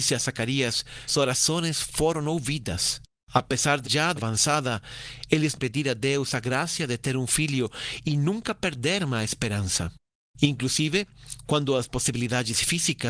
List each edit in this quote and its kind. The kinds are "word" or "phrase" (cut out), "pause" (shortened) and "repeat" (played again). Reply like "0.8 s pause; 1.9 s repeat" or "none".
1.1 s word; 3.2 s pause; 3.8 s word; 4.2 s word; 5.6 s phrase; 10.1 s pause